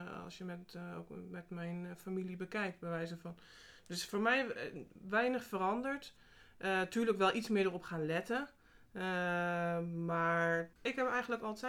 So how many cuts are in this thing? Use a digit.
1